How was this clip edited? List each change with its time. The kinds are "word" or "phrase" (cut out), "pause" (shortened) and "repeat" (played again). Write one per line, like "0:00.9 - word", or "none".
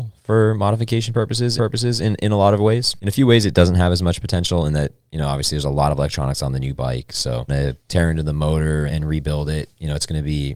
0:01.6 - repeat
0:07.5 - phrase
0:07.8 - pause
0:08.9 - word